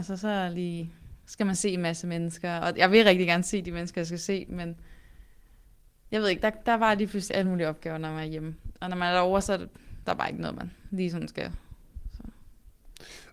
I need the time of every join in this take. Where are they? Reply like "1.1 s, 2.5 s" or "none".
none

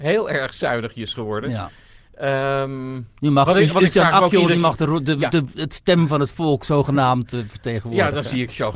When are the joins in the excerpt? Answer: none

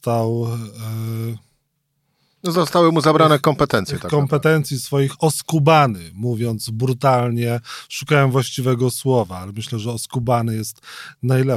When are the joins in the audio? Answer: none

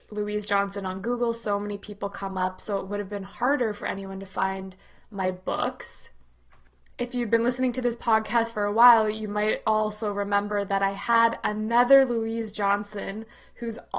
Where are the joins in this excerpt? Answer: none

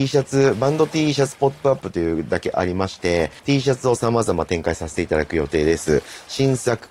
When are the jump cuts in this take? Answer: 3.4 s

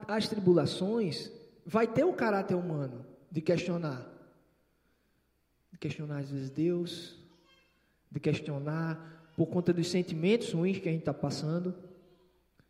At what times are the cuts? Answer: none

